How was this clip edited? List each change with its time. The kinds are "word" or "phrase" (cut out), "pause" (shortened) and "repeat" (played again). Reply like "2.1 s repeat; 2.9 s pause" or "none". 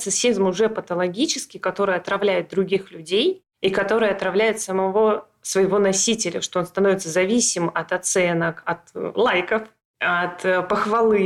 none